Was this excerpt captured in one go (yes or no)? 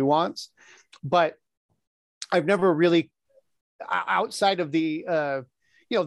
yes